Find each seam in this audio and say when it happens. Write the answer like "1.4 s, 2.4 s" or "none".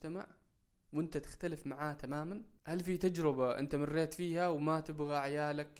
2.6 s